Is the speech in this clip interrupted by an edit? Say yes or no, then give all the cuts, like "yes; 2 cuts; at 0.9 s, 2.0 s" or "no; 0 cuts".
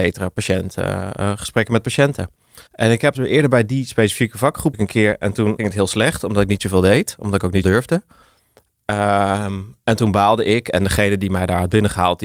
yes; 5 cuts; at 2.7 s, 3.1 s, 4.7 s, 5.6 s, 7.6 s